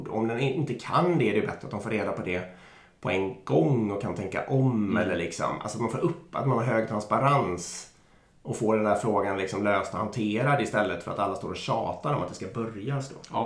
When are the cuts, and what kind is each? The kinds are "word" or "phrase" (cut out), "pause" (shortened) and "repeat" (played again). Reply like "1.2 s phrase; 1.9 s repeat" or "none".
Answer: none